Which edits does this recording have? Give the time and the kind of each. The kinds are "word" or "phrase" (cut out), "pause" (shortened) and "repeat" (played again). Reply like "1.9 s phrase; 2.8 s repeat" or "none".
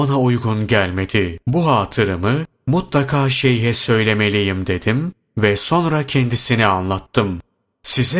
1.4 s pause